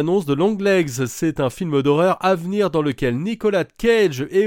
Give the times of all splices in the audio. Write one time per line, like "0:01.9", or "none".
none